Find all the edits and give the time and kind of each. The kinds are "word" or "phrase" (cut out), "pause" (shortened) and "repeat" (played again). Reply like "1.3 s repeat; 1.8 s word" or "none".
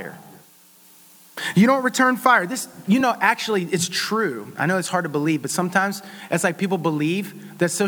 none